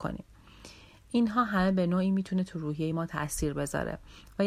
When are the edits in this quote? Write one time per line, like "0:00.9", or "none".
none